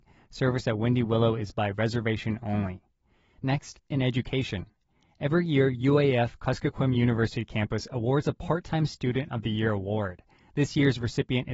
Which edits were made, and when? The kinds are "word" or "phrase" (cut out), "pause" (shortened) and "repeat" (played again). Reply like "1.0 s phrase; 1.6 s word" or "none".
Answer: none

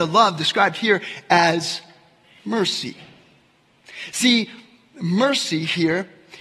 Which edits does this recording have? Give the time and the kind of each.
none

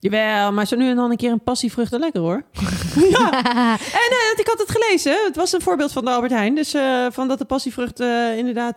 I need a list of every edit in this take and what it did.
1.9 s phrase

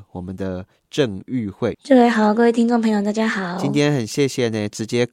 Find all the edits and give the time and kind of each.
1.7 s phrase

